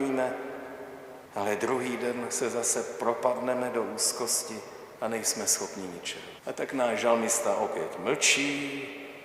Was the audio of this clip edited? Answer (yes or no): yes